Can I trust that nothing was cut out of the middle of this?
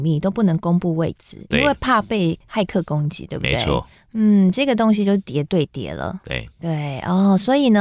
yes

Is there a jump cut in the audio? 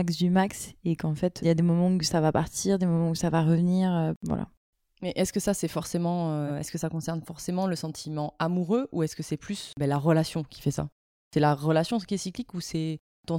yes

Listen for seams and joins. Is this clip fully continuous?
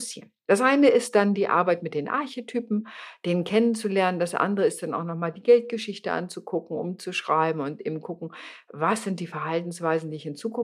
yes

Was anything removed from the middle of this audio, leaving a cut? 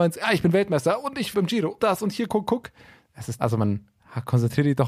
yes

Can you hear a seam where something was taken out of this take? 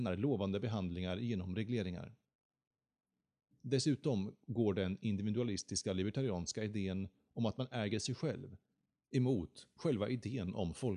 no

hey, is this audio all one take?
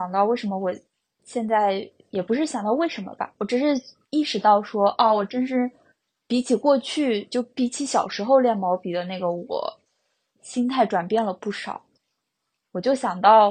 yes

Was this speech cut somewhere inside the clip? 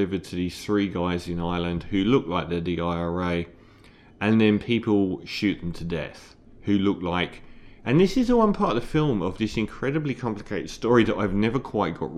no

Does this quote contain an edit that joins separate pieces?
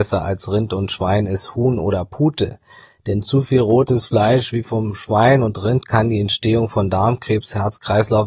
no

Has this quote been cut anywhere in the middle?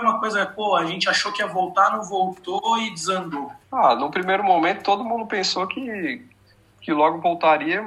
yes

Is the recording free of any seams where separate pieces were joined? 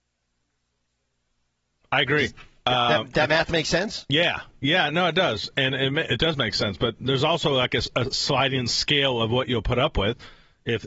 yes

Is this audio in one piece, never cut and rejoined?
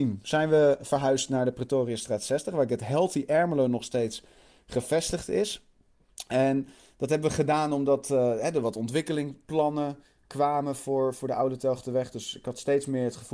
yes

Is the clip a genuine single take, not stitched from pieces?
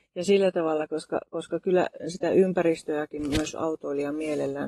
yes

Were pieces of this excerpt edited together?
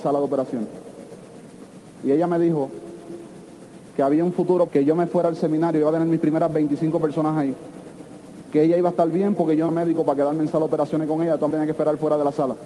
yes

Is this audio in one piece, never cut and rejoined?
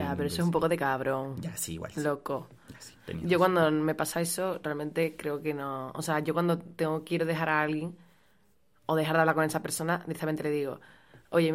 yes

